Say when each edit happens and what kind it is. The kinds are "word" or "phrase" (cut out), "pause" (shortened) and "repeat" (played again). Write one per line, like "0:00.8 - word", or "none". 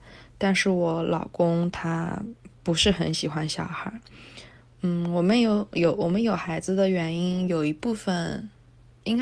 none